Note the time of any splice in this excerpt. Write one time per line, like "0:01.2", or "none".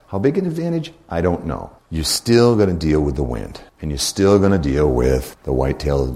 none